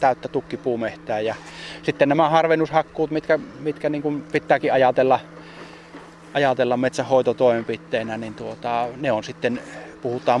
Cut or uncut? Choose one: uncut